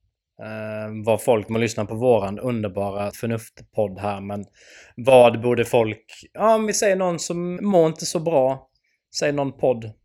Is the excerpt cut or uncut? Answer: cut